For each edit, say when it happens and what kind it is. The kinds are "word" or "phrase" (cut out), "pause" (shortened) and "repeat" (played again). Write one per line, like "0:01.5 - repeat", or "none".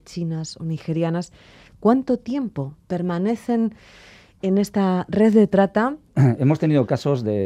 none